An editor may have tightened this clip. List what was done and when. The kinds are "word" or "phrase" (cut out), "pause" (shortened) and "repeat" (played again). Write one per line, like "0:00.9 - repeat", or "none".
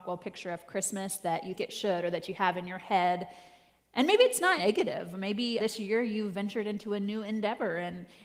0:01.6 - word
0:04.6 - word
0:05.6 - word